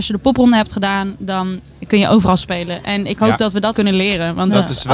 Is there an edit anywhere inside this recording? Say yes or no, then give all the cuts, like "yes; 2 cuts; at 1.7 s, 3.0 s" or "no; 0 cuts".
yes; 1 cut; at 3.7 s